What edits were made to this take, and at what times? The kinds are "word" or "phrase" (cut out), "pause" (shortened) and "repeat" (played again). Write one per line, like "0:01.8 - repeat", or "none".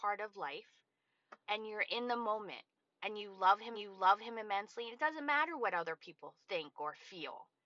0:01.4 - pause
0:02.8 - pause
0:03.7 - repeat
0:06.4 - pause